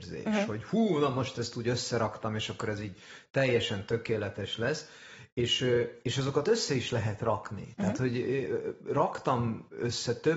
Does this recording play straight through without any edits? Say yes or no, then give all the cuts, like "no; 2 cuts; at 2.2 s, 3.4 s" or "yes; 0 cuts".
yes; 0 cuts